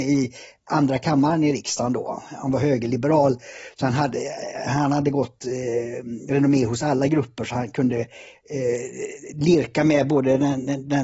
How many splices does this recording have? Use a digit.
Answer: 0